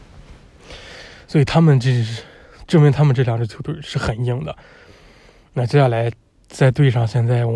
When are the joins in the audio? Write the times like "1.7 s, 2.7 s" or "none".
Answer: none